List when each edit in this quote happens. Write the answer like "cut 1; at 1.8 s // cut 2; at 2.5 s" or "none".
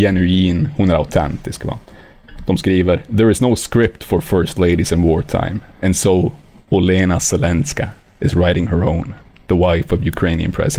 none